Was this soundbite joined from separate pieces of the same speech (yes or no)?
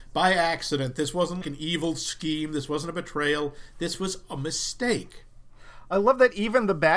yes